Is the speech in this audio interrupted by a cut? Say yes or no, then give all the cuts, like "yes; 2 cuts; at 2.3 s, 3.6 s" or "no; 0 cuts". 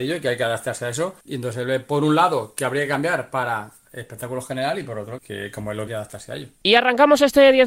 yes; 3 cuts; at 1.2 s, 5.2 s, 5.9 s